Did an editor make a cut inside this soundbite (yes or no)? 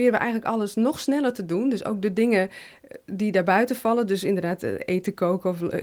no